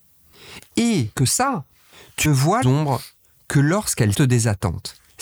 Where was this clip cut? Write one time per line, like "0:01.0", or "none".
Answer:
0:01.1
0:02.2
0:02.6
0:04.1

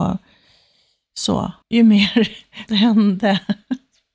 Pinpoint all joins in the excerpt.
0:01.6
0:02.7

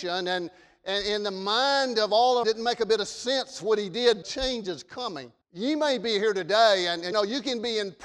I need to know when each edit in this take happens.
0:02.4
0:04.2
0:05.4
0:07.1

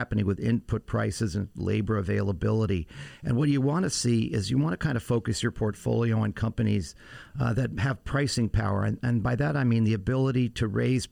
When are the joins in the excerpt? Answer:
none

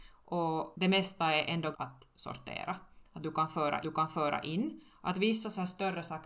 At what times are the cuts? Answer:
0:01.7
0:03.8

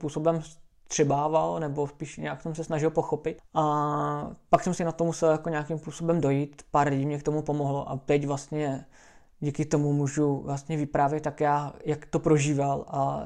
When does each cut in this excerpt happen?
0:03.4

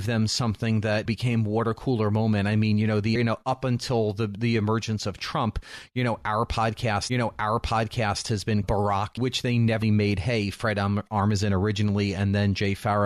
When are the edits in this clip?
0:01.1
0:03.2
0:07.1
0:08.6
0:09.2
0:09.8

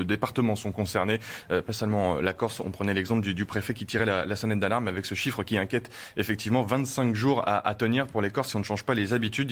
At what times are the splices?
none

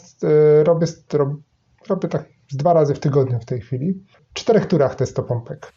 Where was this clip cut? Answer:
none

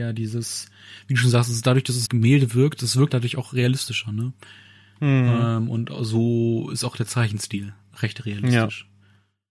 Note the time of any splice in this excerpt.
0:02.1
0:03.1

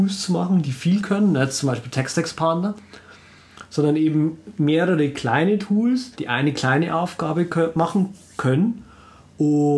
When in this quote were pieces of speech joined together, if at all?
0:06.1

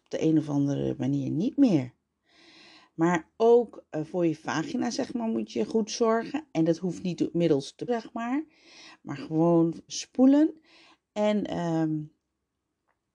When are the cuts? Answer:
0:07.9
0:09.9

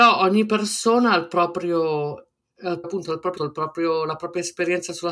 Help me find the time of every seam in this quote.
0:02.8
0:03.4

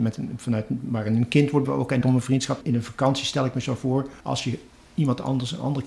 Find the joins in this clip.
0:01.6
0:02.0
0:02.6
0:04.2

